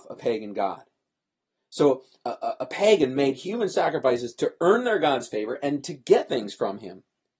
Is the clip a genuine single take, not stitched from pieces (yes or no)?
yes